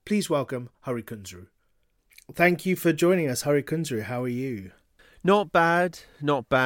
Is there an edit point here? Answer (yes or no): no